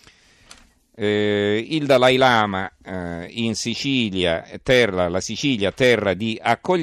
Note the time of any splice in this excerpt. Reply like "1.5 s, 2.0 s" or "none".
none